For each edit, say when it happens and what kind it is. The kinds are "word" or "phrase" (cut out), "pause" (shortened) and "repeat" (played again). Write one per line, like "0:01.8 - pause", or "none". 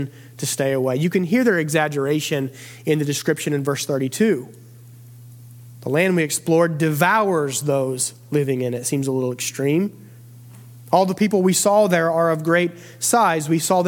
none